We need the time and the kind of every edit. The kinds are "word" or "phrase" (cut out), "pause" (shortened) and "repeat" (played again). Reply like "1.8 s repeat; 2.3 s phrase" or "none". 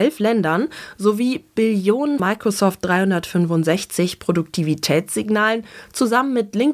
2.2 s word